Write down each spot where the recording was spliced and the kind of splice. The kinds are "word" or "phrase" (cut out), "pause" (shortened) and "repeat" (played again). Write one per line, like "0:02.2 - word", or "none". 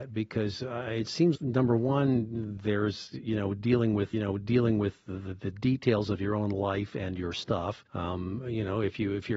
0:01.3 - word
0:04.1 - repeat
0:07.9 - pause